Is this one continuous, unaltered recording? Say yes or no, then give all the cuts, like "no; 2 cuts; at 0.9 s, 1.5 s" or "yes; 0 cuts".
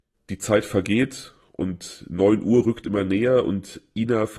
yes; 0 cuts